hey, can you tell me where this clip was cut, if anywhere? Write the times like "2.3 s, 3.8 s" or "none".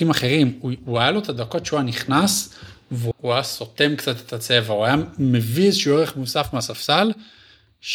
3.1 s